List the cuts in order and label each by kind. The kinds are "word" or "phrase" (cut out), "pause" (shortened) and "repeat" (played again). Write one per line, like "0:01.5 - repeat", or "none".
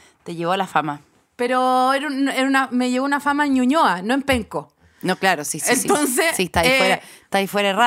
none

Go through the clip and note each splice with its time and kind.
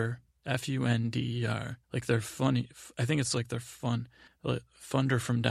0:01.8 - pause
0:04.3 - pause

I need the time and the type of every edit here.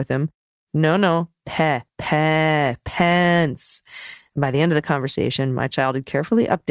0:01.9 - pause

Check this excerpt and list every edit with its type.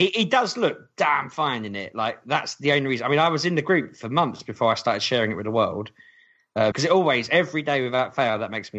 0:06.7 - word

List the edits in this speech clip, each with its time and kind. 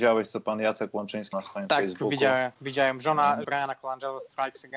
0:01.3 - word
0:03.4 - word

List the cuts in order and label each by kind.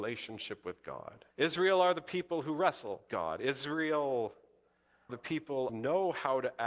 0:01.3 - pause
0:03.1 - word
0:05.1 - word
0:05.7 - phrase

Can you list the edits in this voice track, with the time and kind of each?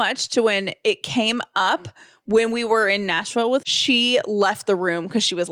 0:03.6 - word

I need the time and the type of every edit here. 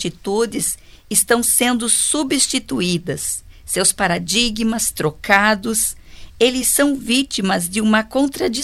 none

